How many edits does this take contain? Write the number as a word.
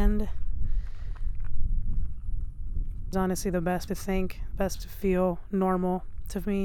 three